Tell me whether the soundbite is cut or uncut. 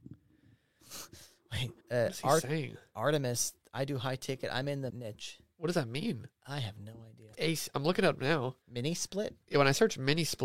cut